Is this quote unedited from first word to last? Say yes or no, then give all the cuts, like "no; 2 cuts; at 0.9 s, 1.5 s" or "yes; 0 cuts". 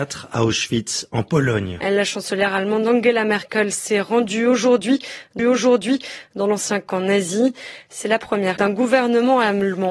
no; 2 cuts; at 5.4 s, 8.6 s